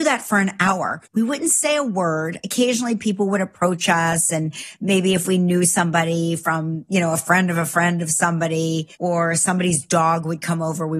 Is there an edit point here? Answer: yes; 2 cuts; at 1.1 s, 8.9 s

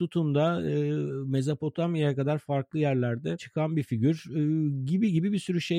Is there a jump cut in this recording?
yes; 1 cut; at 3.4 s

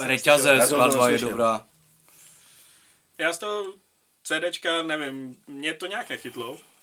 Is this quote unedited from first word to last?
yes; 0 cuts

